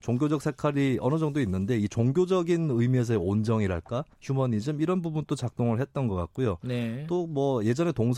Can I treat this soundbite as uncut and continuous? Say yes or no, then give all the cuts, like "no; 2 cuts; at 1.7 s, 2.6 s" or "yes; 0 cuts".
no; 1 cut; at 4.1 s